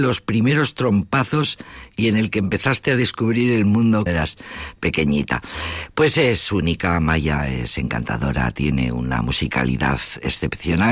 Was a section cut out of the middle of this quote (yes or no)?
yes